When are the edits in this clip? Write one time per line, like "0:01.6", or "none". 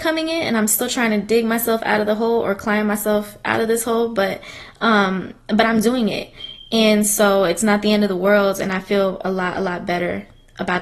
none